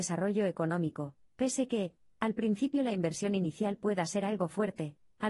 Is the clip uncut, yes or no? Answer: yes